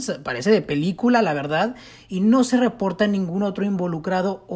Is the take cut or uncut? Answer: uncut